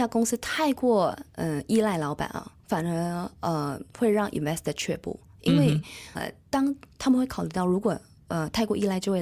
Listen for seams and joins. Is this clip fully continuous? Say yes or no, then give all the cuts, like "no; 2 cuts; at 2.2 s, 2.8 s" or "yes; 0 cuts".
no; 3 cuts; at 2.6 s, 3.9 s, 6.2 s